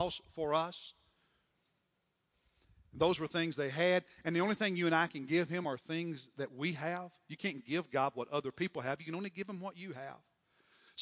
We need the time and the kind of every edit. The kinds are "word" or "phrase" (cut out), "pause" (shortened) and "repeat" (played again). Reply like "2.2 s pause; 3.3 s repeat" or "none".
none